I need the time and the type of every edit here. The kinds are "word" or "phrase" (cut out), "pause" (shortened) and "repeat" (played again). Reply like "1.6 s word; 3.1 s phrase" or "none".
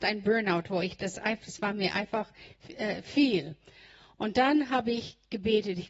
none